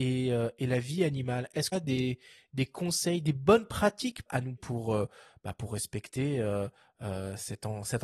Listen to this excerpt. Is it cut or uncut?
cut